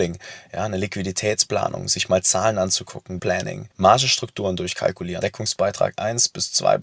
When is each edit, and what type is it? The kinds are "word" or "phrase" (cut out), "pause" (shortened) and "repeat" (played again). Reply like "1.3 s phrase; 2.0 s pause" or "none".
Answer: 3.2 s word; 3.7 s pause; 5.2 s word